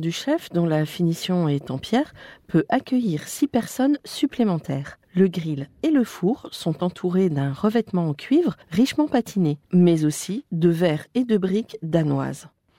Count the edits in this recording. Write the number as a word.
three